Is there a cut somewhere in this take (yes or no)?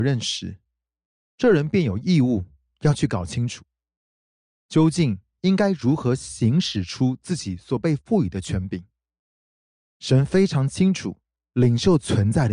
no